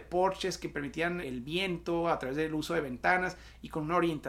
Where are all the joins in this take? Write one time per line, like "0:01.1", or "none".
0:01.2